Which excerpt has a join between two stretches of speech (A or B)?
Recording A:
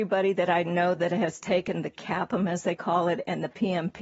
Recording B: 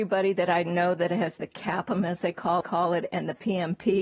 B